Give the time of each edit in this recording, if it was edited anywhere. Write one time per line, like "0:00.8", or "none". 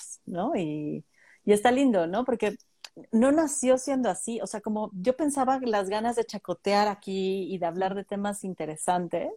none